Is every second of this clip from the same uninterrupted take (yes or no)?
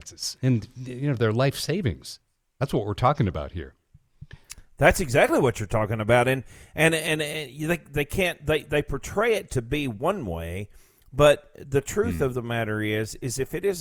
yes